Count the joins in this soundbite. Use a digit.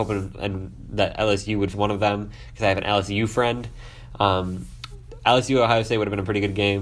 1